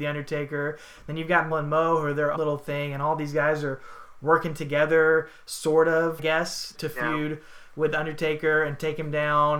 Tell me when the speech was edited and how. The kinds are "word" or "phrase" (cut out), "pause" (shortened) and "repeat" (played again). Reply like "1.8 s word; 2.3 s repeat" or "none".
1.5 s word; 2.4 s word; 6.2 s word; 6.7 s word